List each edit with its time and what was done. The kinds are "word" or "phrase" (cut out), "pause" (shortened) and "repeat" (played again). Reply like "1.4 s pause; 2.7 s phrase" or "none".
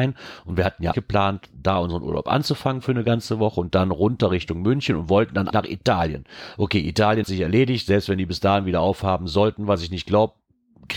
0.9 s word; 5.5 s word; 7.2 s word